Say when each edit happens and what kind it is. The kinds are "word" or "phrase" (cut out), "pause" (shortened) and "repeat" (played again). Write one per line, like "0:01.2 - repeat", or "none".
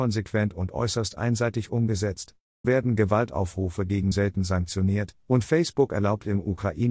0:02.6 - word
0:04.1 - word